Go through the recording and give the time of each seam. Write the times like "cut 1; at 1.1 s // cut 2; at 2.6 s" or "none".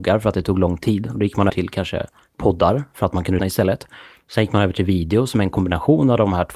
cut 1; at 1.5 s // cut 2; at 3.4 s